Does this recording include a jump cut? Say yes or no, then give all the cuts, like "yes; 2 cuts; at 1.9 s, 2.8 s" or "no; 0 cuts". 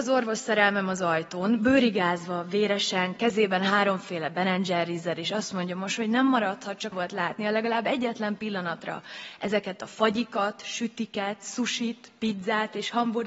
yes; 1 cut; at 6.9 s